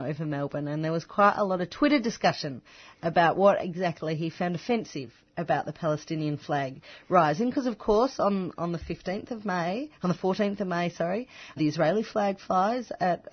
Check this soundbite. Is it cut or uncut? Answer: cut